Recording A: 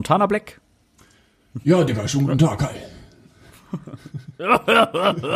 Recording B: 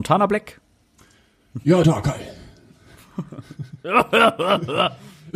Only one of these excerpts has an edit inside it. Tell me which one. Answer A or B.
B